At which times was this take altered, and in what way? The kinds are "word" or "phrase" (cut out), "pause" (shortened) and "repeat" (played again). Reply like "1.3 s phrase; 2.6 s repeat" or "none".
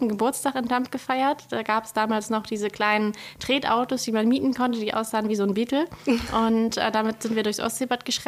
none